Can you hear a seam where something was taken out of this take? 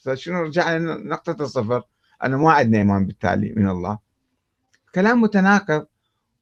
no; 0 cuts

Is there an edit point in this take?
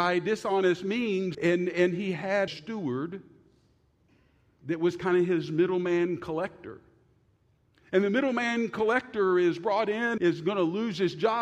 yes; 3 cuts; at 1.3 s, 2.5 s, 10.2 s

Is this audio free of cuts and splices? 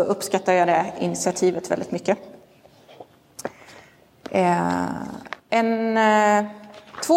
no; 1 cut; at 5.4 s

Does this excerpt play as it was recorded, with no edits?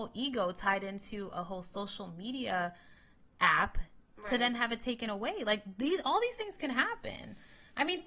yes; 0 cuts

